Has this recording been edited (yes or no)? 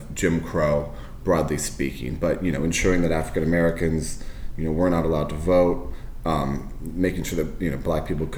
no